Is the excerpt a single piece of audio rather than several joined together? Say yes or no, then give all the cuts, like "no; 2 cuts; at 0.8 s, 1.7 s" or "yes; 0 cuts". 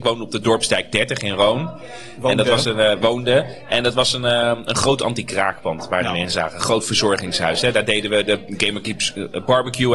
yes; 0 cuts